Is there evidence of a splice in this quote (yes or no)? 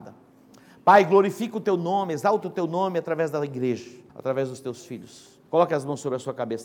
yes